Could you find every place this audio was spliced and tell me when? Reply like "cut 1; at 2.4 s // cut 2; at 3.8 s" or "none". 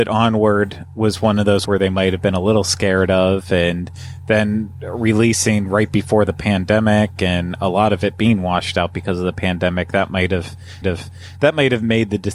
cut 1; at 1.6 s // cut 2; at 10.8 s